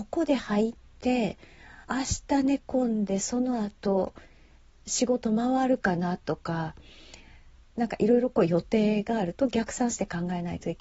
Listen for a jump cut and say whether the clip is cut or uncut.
cut